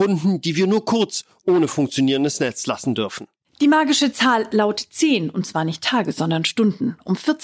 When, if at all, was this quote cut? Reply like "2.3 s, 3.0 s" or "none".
none